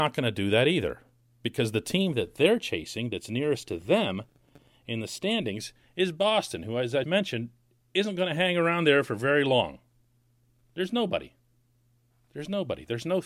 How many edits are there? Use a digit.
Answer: 1